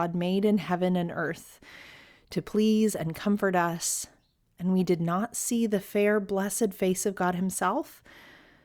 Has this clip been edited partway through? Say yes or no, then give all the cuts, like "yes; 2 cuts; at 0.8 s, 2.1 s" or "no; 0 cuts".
no; 0 cuts